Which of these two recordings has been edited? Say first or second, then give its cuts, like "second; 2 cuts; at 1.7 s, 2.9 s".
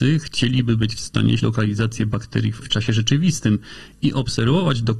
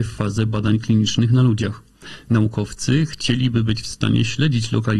first; 2 cuts; at 1.4 s, 2.6 s